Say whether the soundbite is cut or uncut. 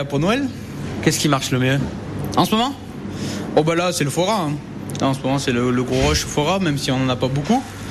uncut